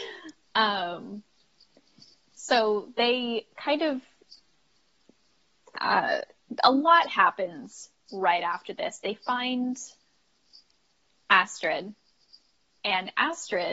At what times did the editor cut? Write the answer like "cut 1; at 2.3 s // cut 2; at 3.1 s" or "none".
none